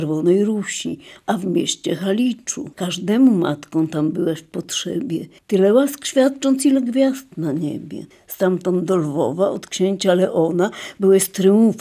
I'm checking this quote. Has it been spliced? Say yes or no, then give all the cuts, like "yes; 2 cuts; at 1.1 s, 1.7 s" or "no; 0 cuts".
yes; 3 cuts; at 2.7 s, 5.4 s, 8.1 s